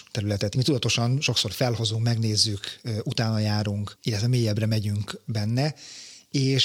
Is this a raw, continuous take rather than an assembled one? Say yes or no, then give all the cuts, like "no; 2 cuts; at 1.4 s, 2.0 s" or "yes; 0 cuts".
yes; 0 cuts